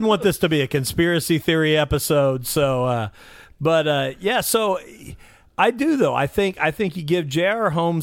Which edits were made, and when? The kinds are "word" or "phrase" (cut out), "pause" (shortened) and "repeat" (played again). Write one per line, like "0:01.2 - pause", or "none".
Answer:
none